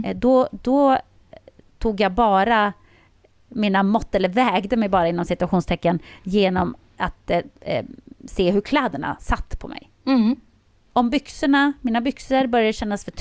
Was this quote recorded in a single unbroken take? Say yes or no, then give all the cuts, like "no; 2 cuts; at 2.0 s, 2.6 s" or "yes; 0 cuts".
yes; 0 cuts